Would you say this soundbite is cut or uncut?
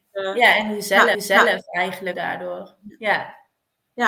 cut